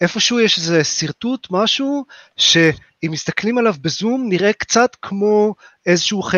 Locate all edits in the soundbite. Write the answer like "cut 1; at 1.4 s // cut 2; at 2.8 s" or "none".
none